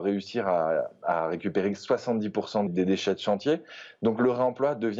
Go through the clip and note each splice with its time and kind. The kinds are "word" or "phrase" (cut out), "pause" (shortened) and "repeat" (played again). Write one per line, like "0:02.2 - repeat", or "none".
0:02.7 - word